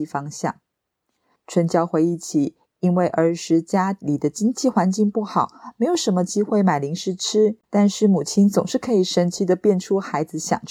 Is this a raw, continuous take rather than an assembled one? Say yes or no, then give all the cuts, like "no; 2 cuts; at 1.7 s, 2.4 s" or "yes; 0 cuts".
no; 1 cut; at 7.6 s